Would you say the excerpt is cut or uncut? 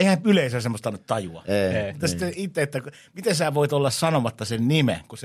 uncut